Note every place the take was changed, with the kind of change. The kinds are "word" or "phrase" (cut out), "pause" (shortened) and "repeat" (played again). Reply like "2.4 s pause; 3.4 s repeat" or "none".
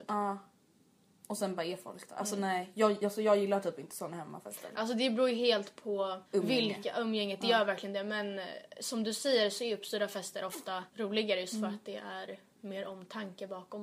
6.3 s pause; 10.9 s pause